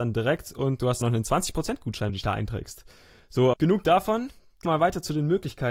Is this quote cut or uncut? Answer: cut